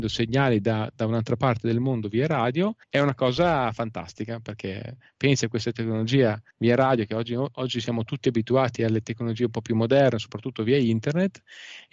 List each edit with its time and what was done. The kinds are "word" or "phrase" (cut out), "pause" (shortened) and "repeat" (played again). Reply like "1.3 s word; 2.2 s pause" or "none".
2.8 s pause; 6.5 s pause